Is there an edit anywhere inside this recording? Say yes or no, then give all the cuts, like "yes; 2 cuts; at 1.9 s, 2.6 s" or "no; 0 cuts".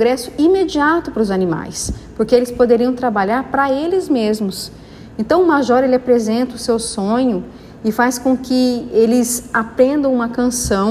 no; 0 cuts